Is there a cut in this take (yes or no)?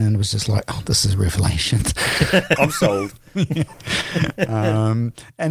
yes